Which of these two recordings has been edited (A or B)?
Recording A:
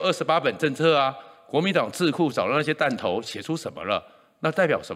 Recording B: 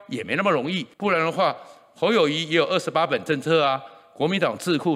B